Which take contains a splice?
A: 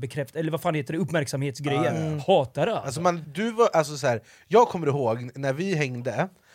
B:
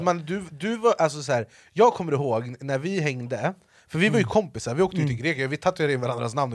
A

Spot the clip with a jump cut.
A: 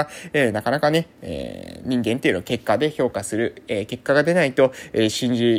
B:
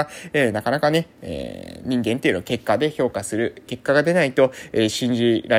B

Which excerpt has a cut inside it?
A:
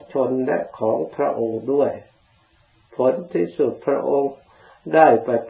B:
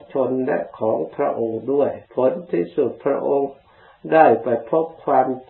B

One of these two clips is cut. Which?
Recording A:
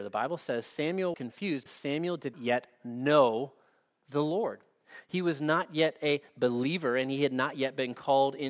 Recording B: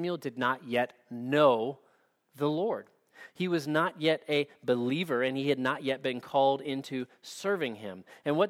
A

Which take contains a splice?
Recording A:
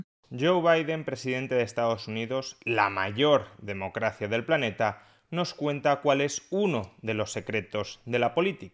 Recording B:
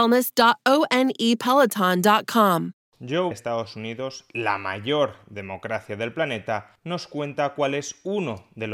B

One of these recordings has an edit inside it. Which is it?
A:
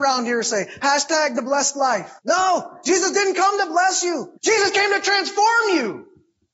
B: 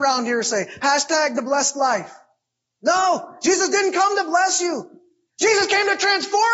A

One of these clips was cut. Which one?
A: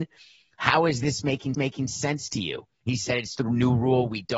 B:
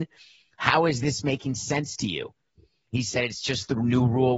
A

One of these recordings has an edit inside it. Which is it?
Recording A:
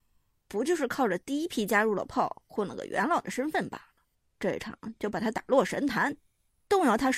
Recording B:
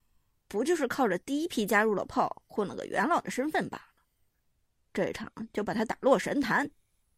A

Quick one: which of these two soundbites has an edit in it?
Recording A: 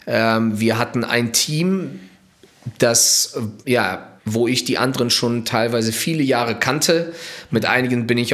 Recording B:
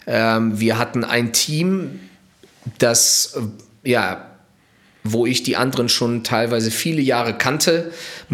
A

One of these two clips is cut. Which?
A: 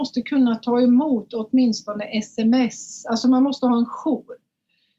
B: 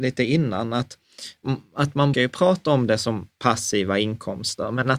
B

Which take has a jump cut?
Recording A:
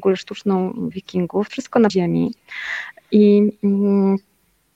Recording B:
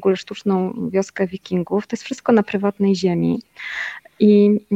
A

